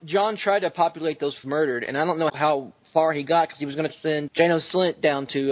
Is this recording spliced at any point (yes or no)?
yes